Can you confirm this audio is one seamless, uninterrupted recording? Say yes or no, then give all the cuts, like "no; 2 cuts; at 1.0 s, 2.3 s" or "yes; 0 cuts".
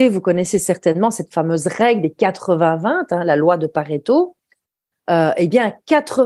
yes; 0 cuts